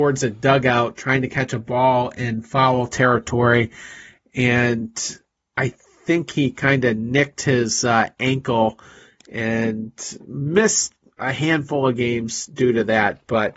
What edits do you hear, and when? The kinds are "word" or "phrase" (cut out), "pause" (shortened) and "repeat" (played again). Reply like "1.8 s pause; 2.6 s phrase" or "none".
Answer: none